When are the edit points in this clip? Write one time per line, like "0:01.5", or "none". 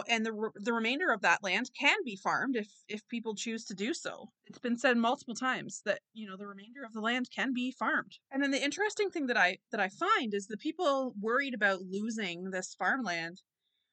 0:04.3
0:08.2